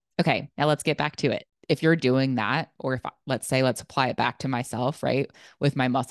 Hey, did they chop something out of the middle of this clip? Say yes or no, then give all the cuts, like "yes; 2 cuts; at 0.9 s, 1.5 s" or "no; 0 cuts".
no; 0 cuts